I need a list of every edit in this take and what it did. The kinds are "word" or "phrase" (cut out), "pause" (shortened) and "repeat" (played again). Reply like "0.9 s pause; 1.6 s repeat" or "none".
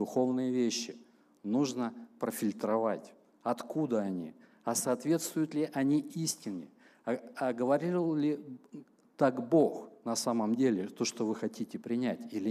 none